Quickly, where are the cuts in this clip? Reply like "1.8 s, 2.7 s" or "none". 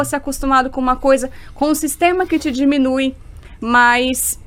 none